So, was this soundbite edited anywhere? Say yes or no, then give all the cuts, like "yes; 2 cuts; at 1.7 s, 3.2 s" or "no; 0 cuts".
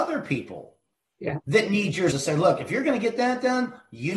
yes; 1 cut; at 2.1 s